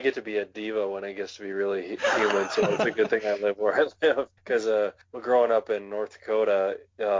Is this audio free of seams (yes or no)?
no